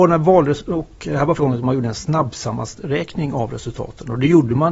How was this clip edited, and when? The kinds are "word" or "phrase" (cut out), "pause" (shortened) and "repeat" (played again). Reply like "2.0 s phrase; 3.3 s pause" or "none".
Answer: 1.4 s word